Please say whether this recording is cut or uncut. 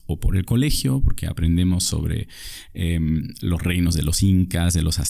uncut